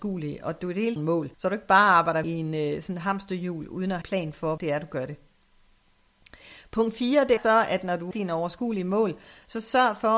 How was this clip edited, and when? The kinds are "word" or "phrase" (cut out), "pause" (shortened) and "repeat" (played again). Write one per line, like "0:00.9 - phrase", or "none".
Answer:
0:01.0 - phrase
0:01.3 - pause
0:02.2 - word
0:04.0 - phrase
0:04.6 - word
0:07.4 - word
0:08.1 - phrase